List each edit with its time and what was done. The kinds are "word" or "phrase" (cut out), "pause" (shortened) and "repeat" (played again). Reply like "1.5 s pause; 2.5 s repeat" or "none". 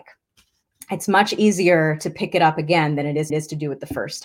3.3 s repeat